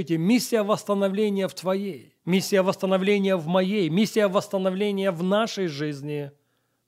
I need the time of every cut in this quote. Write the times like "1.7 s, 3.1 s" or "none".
2.2 s

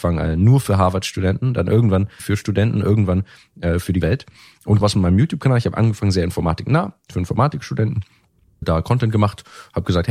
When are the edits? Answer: 2.2 s, 4.0 s, 4.8 s, 8.6 s

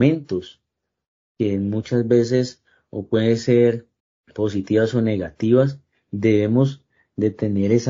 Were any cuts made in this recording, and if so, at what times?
4.0 s

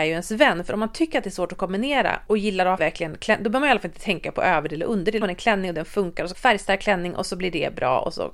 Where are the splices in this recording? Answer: 2.3 s, 2.8 s, 5.2 s, 6.3 s

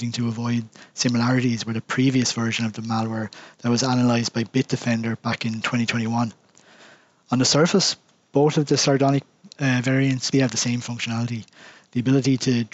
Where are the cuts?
10.3 s

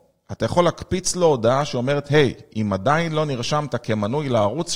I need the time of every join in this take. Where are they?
none

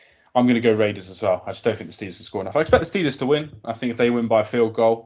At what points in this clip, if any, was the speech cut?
none

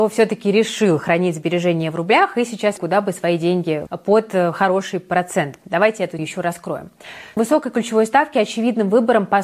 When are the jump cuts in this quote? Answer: 2.8 s, 3.9 s, 6.2 s, 7.4 s

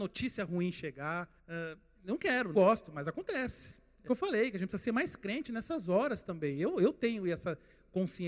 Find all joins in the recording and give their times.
1.4 s, 2.5 s, 4.1 s

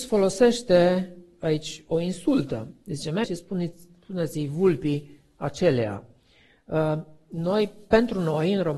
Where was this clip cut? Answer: 3.2 s

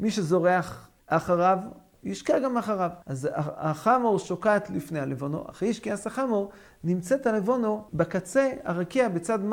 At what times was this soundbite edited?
1.0 s, 3.0 s, 7.9 s

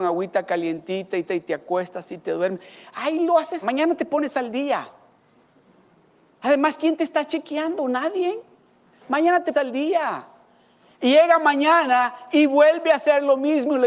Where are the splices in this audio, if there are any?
1.3 s, 3.6 s, 9.5 s

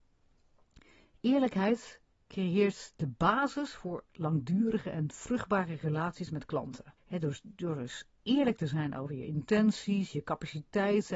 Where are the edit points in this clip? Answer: 7.0 s

